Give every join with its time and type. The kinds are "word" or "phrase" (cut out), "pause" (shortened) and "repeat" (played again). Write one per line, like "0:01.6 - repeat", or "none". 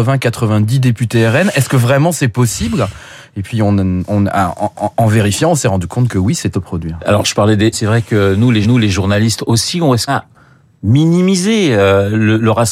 0:04.7 - repeat
0:06.5 - phrase
0:07.7 - phrase
0:08.6 - repeat
0:10.1 - word